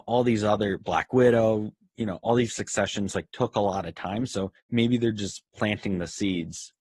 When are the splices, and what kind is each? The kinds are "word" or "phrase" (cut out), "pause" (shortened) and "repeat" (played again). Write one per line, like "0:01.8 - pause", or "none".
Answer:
0:02.5 - word
0:04.6 - pause